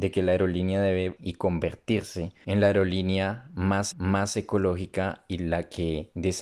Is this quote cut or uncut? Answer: cut